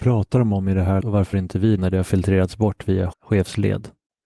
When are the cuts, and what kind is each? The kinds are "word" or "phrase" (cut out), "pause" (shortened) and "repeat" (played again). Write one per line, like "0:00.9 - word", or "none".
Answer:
0:01.0 - word
0:01.3 - word
0:01.8 - word
0:03.1 - word

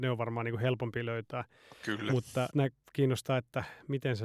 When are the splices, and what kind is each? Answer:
0:02.5 - word

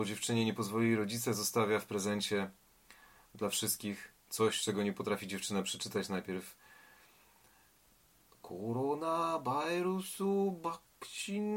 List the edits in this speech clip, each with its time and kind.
0:04.2 - pause

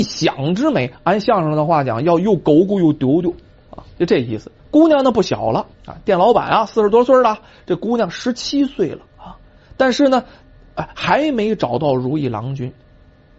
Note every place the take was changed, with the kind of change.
0:00.9 - pause
0:04.6 - pause
0:05.7 - pause
0:09.1 - pause

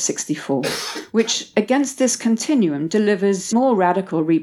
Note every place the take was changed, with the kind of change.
0:03.5 - word

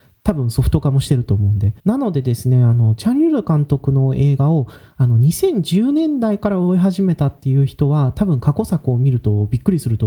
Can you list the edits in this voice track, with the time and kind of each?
0:01.8 - pause

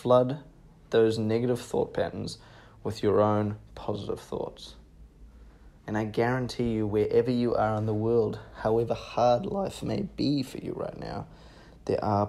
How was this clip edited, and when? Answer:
0:05.8 - pause

